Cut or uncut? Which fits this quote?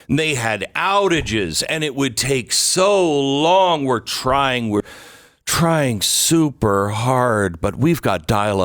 uncut